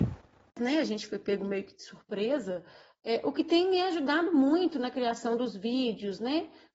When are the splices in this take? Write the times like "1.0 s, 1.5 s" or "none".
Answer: none